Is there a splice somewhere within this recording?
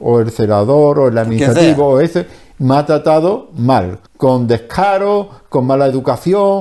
yes; 1 cut; at 4.1 s

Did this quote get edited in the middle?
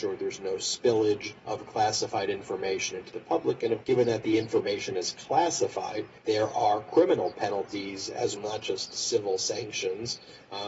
yes; 4 cuts; at 1.4 s, 3.8 s, 6.2 s, 8.4 s

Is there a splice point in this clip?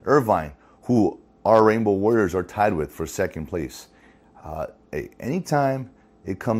no; 0 cuts

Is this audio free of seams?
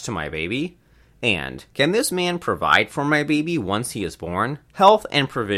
no; 2 cuts; at 1.7 s, 4.7 s

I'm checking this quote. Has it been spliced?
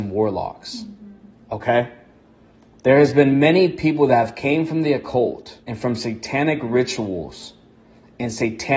yes; 1 cut; at 5.6 s

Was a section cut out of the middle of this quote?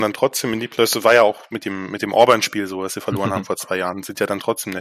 no; 0 cuts

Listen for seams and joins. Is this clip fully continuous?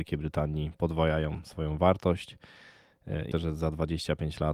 no; 1 cut; at 3.3 s

